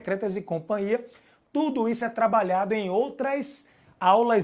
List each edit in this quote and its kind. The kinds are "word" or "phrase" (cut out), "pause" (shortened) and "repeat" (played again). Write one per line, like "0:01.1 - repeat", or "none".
none